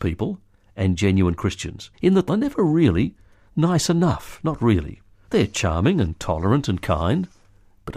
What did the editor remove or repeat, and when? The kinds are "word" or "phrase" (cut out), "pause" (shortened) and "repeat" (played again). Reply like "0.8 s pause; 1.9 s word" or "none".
1.9 s pause; 2.3 s phrase; 5.1 s pause